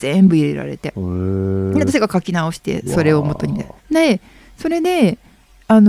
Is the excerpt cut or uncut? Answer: cut